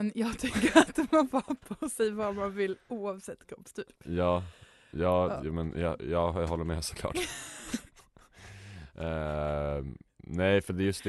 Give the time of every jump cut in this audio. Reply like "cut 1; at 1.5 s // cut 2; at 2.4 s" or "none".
cut 1; at 4.0 s